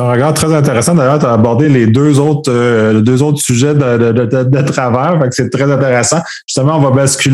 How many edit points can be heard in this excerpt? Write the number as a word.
zero